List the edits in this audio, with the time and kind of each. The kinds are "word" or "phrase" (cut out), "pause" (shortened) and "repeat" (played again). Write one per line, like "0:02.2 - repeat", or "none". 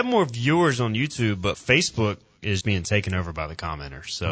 0:01.5 - word
0:02.6 - word

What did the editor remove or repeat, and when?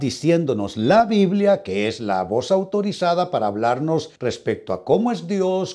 0:04.2 - pause

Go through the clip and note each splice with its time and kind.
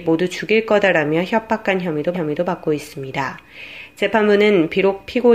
0:02.1 - repeat

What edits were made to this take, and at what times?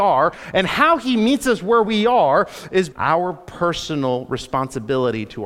0:02.9 - phrase

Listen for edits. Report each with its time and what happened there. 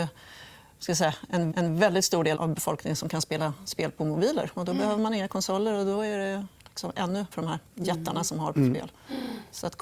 0:01.5 - repeat
0:02.4 - word
0:07.3 - word
0:07.7 - pause

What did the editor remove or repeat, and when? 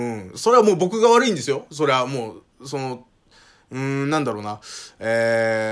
none

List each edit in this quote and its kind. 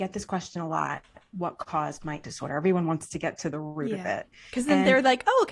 0:02.2 - word

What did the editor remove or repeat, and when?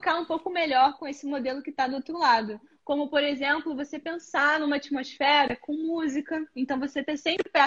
none

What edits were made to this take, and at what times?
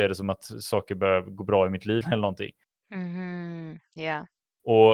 0:02.0 - word

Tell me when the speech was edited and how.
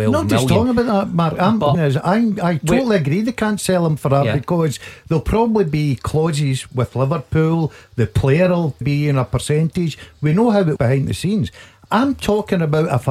0:01.7 - phrase
0:08.8 - word
0:10.8 - word

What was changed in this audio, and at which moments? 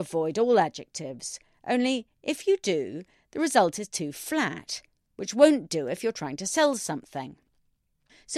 none

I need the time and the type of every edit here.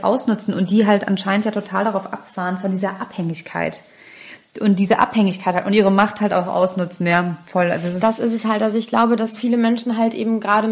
none

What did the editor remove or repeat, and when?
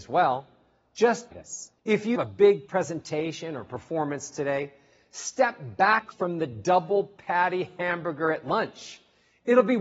0:01.3 - word
0:01.8 - pause
0:02.2 - word

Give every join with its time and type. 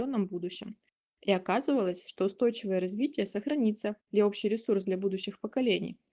0:04.0 - pause

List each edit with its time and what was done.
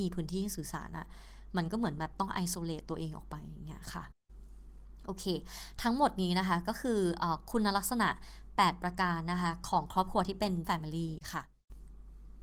0:10.6 - word

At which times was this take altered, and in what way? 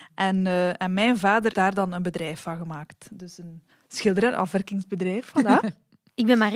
0:01.5 - word
0:03.7 - pause

